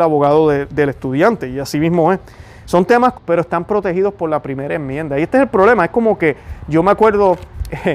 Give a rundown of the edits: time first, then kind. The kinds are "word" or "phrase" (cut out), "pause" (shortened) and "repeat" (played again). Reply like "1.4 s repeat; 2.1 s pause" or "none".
3.1 s word